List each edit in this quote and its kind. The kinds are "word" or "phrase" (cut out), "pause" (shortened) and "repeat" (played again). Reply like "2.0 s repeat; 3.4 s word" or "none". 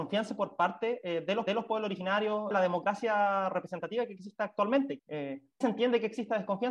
1.5 s repeat; 2.5 s phrase; 5.0 s word; 5.6 s word